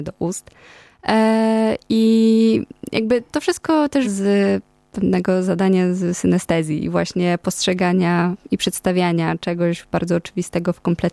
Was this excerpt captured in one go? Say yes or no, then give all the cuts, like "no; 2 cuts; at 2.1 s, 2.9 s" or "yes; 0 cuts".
no; 1 cut; at 4.0 s